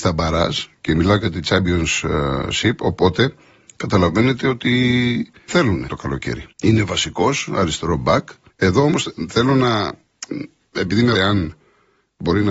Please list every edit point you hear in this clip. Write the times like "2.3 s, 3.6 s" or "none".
5.5 s, 5.9 s, 6.5 s, 8.5 s, 11.1 s